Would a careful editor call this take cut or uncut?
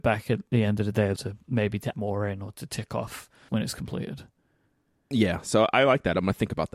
cut